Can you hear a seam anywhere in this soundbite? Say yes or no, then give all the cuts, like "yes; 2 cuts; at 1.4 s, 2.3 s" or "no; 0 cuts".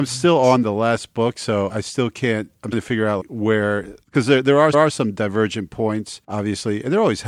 yes; 6 cuts; at 1.7 s, 2.7 s, 3.2 s, 4.0 s, 4.7 s, 6.2 s